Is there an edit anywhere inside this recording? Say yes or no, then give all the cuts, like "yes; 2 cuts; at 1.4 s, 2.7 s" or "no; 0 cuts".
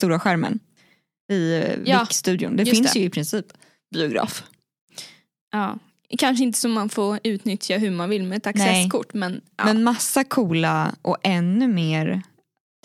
no; 0 cuts